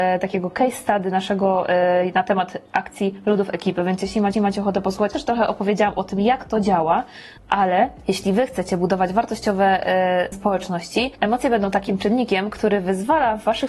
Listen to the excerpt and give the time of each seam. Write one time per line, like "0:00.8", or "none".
0:04.3
0:05.1
0:07.4
0:10.3